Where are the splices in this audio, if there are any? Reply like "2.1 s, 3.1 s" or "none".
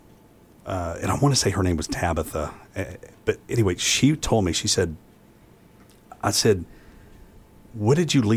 none

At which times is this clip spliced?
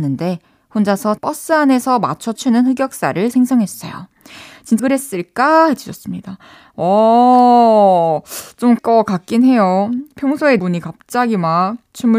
1.2 s, 2.4 s, 3.3 s, 4.8 s, 8.8 s, 10.6 s

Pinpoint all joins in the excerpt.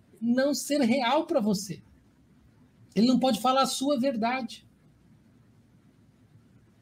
none

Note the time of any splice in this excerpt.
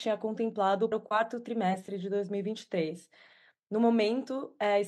0.9 s

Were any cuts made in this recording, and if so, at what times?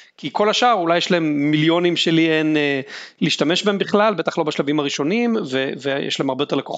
none

